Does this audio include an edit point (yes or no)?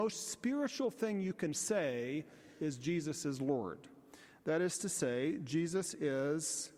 no